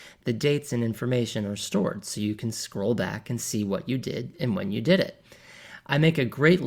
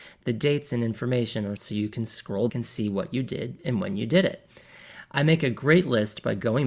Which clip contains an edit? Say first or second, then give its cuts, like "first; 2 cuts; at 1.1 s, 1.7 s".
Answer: second; 2 cuts; at 1.6 s, 2.5 s